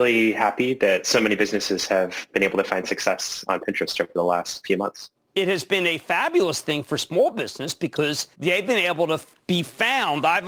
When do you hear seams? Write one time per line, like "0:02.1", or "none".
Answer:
0:05.1
0:08.3